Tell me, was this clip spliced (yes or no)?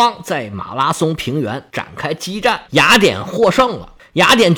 yes